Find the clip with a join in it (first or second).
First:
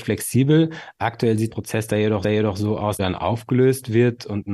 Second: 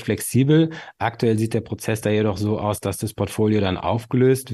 first